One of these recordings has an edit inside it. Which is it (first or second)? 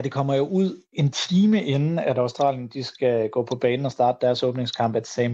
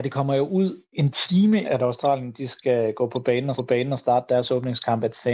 second